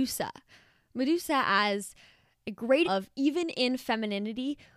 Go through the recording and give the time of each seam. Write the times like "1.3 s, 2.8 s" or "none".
2.8 s